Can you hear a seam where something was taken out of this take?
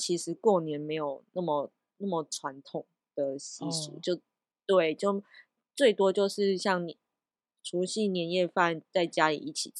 no; 0 cuts

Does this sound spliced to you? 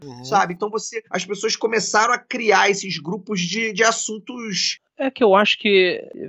yes; 1 cut; at 1.1 s

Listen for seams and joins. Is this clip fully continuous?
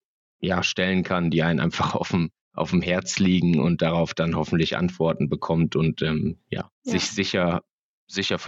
no; 2 cuts; at 2.4 s, 6.7 s

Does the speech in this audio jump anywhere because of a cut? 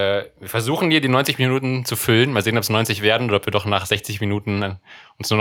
no; 0 cuts

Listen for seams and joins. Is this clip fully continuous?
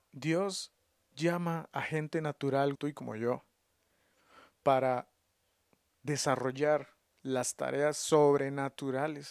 no; 2 cuts; at 2.7 s, 7.1 s

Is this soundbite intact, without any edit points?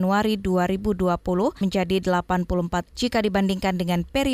no; 2 cuts; at 1.6 s, 2.9 s

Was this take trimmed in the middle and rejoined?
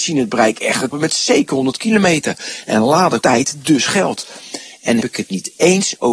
yes; 3 cuts; at 0.9 s, 3.2 s, 5.0 s

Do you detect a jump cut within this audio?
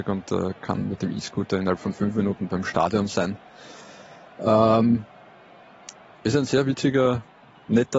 no; 0 cuts

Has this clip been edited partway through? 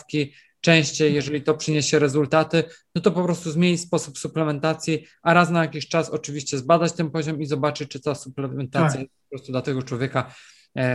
no; 0 cuts

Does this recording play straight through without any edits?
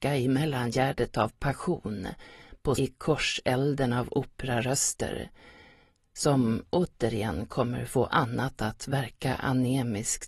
no; 2 cuts; at 2.8 s, 8.1 s

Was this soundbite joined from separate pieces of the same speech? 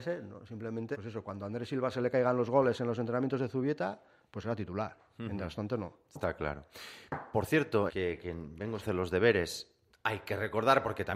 yes; 3 cuts; at 0.9 s, 7.9 s, 8.8 s

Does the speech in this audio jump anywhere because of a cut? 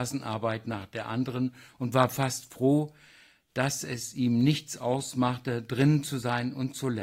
no; 0 cuts

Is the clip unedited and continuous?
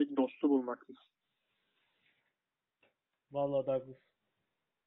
yes; 0 cuts

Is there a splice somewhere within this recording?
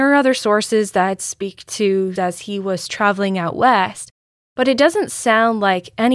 yes; 1 cut; at 2.2 s

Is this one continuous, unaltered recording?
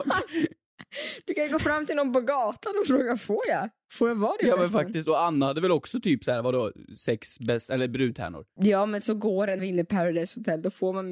no; 1 cut; at 9.6 s

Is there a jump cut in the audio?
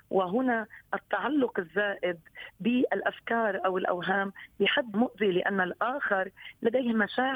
yes; 1 cut; at 4.9 s

